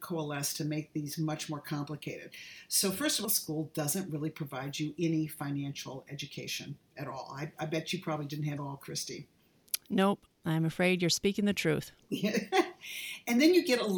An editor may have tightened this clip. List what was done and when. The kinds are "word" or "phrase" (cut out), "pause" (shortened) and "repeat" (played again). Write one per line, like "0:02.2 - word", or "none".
0:03.2 - phrase
0:08.6 - phrase